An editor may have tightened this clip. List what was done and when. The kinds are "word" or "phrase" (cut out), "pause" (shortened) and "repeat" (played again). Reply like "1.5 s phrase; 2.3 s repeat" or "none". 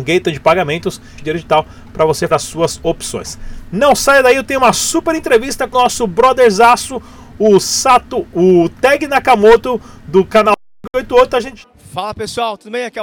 1.2 s phrase; 2.3 s word; 5.7 s word